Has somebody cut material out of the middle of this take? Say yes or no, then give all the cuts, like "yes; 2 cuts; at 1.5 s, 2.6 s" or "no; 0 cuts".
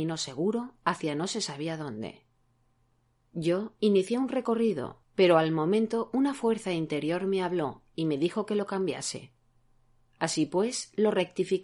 no; 0 cuts